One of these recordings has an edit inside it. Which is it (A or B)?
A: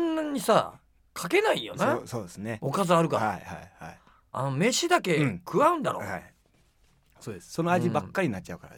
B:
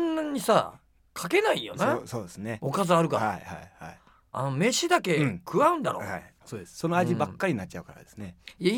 B